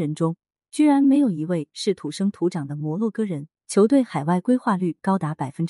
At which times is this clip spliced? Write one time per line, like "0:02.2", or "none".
0:03.6